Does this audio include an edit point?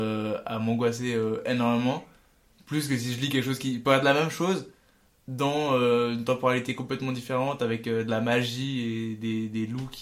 no; 0 cuts

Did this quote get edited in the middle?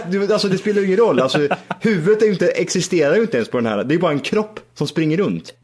no; 0 cuts

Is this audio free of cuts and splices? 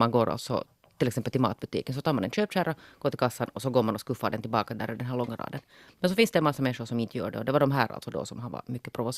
yes; 0 cuts

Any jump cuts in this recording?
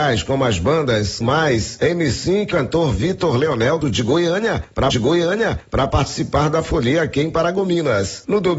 yes; 4 cuts; at 1.2 s, 2.5 s, 3.8 s, 4.9 s

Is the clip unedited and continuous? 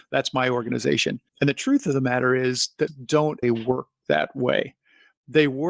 no; 3 cuts; at 1.3 s, 2.9 s, 3.4 s

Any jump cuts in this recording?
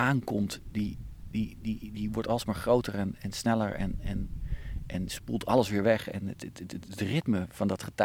no; 0 cuts

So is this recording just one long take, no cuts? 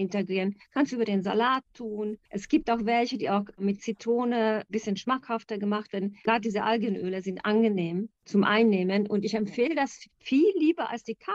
yes; 0 cuts

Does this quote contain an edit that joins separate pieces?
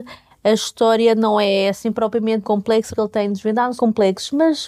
yes; 3 cuts; at 2.4 s, 2.9 s, 3.8 s

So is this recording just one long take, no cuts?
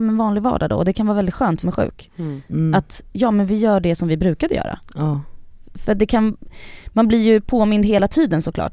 no; 1 cut; at 1.6 s

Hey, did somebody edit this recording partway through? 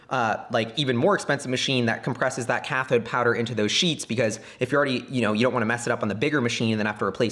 no; 0 cuts

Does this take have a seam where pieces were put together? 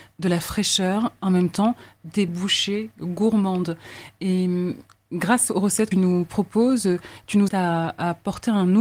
yes; 4 cuts; at 1.2 s, 2.3 s, 5.9 s, 7.5 s

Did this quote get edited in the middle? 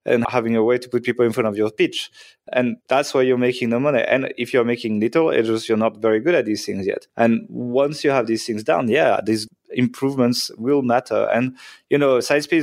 yes; 2 cuts; at 2.8 s, 7.1 s

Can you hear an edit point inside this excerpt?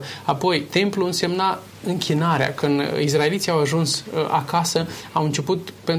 no; 0 cuts

